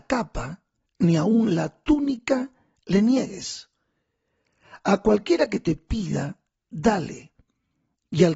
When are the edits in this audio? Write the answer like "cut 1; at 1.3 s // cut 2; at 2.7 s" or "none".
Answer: none